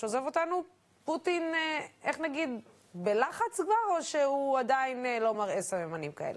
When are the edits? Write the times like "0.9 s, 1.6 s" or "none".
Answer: none